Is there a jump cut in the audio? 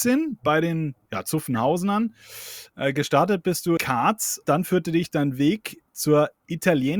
yes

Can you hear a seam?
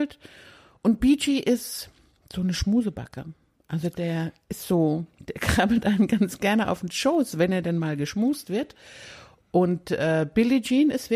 no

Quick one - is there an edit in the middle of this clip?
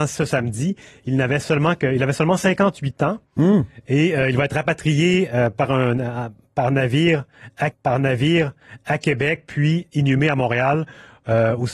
yes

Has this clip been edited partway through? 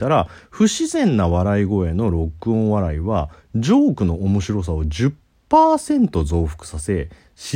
no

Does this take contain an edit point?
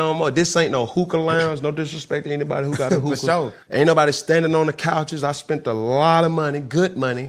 yes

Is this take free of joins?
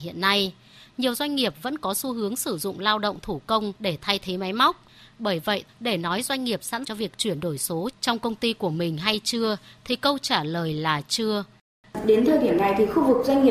no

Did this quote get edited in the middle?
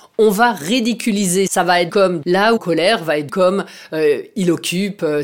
yes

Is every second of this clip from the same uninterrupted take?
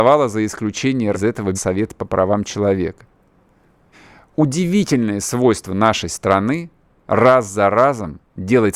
no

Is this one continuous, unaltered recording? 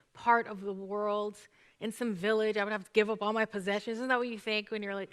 yes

